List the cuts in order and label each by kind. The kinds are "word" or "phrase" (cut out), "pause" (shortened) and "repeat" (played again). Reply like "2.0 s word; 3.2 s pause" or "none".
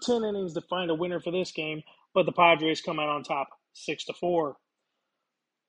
none